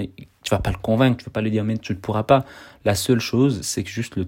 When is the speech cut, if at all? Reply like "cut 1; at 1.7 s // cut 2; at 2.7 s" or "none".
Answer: none